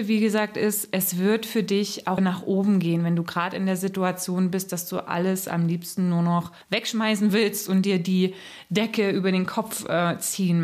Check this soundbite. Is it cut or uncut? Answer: cut